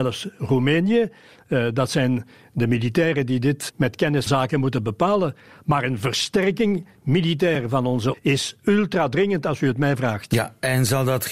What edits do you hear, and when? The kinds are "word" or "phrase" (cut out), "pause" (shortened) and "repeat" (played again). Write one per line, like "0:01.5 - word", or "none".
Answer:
0:03.7 - word
0:04.3 - word
0:08.1 - word